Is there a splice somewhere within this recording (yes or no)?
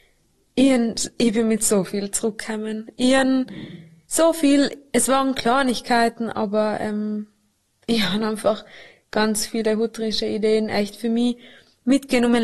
no